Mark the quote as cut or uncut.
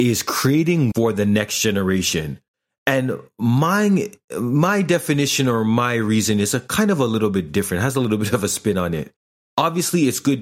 cut